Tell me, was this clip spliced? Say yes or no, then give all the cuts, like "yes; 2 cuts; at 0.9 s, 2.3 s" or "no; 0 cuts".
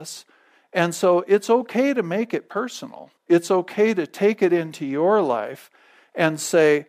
yes; 1 cut; at 3.2 s